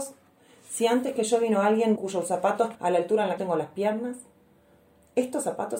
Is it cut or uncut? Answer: cut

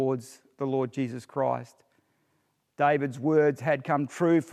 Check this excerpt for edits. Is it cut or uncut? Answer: uncut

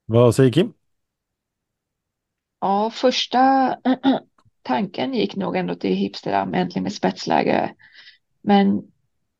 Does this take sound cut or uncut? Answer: uncut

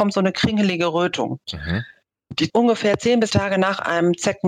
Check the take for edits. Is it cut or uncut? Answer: cut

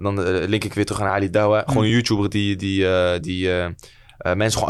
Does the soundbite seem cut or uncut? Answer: uncut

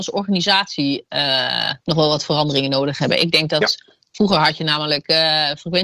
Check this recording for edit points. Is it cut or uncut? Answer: cut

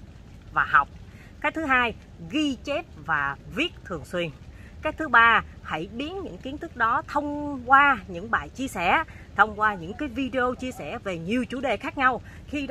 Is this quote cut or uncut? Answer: uncut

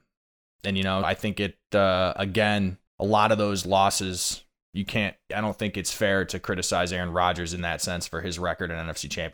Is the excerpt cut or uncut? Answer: cut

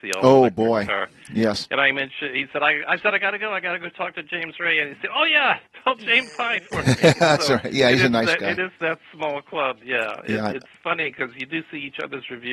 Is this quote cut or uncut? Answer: uncut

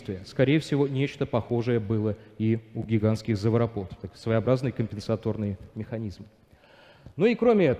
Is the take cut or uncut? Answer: uncut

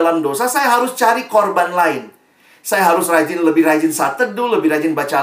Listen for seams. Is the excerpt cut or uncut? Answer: uncut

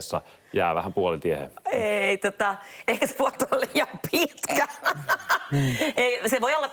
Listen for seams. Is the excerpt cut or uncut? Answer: cut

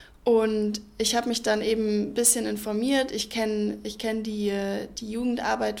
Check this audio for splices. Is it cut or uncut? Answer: uncut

